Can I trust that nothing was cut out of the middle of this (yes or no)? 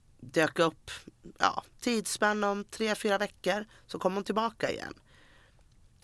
yes